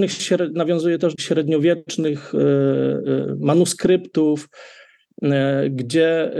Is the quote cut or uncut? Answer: cut